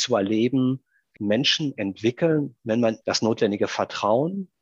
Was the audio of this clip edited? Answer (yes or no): yes